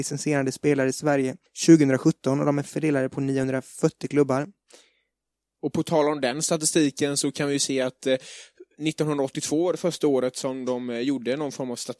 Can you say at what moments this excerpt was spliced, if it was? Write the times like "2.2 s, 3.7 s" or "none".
none